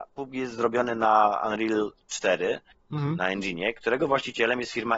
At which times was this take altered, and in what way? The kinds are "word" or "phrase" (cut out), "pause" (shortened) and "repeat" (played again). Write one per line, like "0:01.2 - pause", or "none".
none